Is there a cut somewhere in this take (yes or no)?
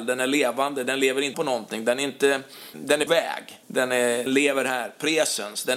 yes